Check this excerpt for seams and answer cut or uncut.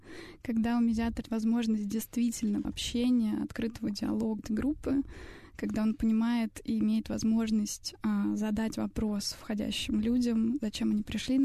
cut